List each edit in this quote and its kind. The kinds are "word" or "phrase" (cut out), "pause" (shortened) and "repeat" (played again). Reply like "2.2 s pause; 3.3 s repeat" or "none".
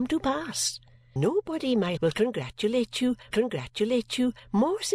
1.2 s word; 2.0 s word; 3.3 s repeat